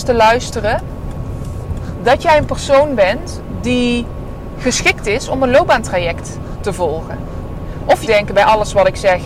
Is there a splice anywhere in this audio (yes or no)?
yes